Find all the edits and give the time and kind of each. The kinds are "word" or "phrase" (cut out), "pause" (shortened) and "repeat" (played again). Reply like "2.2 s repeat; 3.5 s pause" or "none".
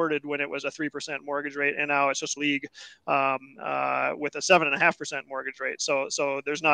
2.4 s phrase